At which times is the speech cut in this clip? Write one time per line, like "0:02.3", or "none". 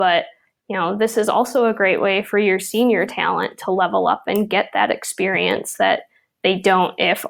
none